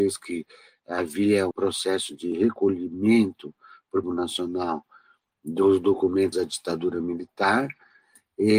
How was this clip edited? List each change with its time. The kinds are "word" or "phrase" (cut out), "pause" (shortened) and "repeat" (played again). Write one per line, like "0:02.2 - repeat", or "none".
0:01.5 - word
0:04.0 - phrase
0:06.3 - word